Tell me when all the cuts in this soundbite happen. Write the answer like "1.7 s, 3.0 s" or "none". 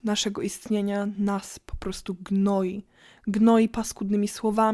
none